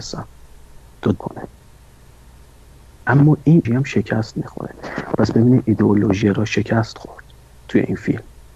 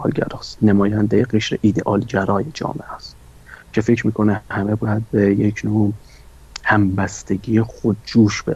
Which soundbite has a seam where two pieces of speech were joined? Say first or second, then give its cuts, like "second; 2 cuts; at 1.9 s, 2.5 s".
first; 3 cuts; at 1.2 s, 3.6 s, 6.2 s